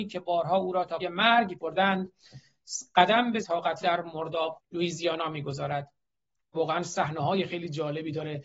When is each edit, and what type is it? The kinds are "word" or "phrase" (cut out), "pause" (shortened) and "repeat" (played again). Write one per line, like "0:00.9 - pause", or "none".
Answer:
0:01.0 - word
0:01.6 - word
0:03.4 - word
0:03.8 - word
0:04.5 - word
0:06.5 - word